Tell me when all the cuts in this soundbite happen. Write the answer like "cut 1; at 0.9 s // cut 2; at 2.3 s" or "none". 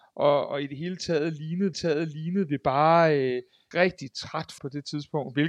cut 1; at 1.7 s // cut 2; at 3.7 s // cut 3; at 4.6 s